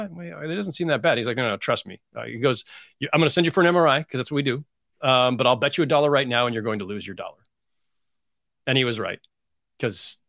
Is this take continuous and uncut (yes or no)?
yes